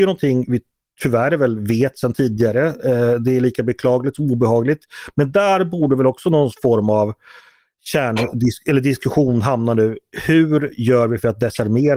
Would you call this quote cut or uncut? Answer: uncut